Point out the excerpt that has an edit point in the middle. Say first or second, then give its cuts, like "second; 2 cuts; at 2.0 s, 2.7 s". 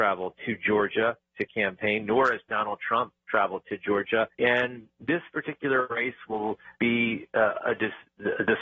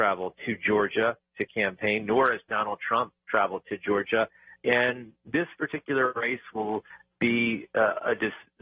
first; 2 cuts; at 4.3 s, 6.7 s